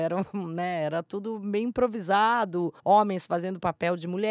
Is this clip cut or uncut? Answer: cut